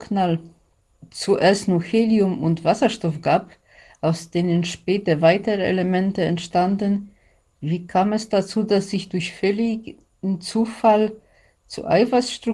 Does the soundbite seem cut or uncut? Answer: uncut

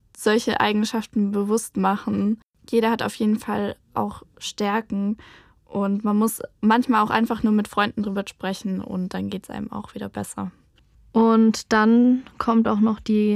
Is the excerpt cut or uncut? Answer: uncut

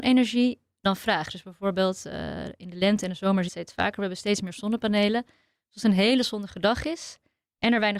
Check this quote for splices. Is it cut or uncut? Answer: cut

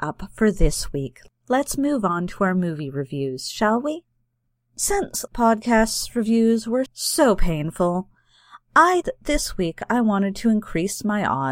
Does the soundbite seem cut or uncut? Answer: cut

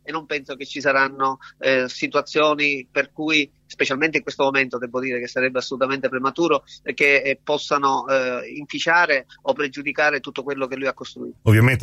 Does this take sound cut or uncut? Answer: uncut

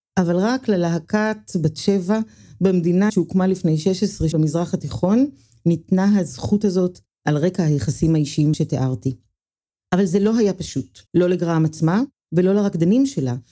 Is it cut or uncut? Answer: cut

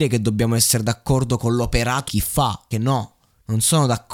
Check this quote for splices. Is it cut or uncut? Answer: cut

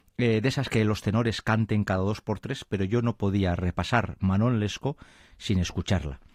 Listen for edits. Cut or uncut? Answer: uncut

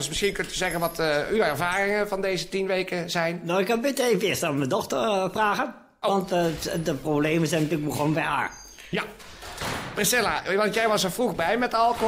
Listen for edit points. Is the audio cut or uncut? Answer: uncut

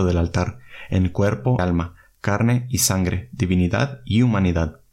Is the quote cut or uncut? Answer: cut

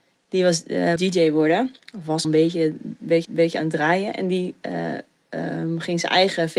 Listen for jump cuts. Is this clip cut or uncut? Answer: cut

